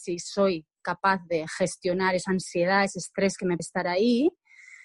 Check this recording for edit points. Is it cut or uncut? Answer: cut